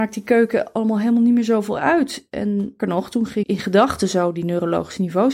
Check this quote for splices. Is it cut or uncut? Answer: cut